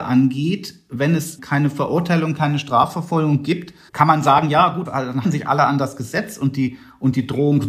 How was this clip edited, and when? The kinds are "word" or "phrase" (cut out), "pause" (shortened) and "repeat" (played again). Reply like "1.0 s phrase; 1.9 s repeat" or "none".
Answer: 1.4 s word; 3.9 s pause; 4.9 s word; 5.2 s word